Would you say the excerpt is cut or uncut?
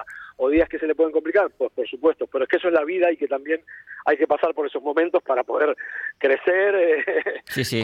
cut